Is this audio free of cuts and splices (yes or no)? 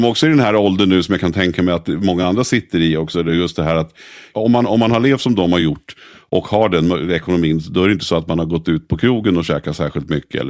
yes